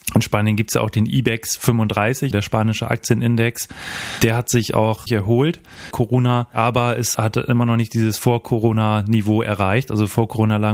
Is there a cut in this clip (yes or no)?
yes